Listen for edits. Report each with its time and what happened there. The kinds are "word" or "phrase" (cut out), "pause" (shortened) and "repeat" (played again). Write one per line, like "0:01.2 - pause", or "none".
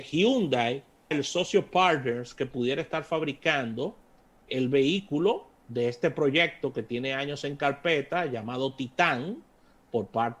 0:01.1 - word
0:04.5 - word